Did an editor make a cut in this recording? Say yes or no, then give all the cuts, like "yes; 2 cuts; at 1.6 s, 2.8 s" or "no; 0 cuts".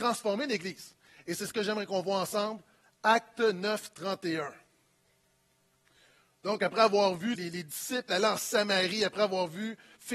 yes; 1 cut; at 7.4 s